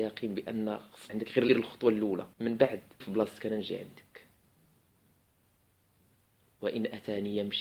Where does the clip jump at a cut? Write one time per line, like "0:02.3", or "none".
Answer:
0:01.1
0:01.5
0:02.3
0:03.0